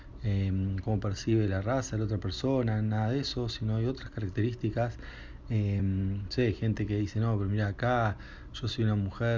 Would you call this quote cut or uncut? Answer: uncut